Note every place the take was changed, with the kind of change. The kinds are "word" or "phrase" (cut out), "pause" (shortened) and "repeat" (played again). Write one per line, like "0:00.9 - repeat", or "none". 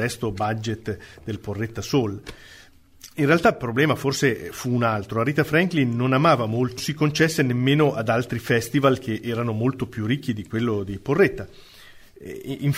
0:06.8 - phrase